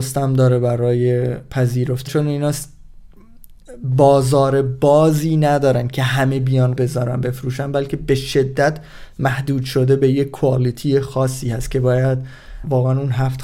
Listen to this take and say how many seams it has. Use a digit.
2